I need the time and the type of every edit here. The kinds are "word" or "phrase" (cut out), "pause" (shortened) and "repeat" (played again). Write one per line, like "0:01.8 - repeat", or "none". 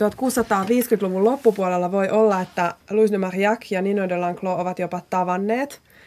0:02.8 - pause